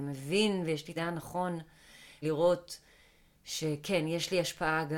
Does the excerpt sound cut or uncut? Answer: cut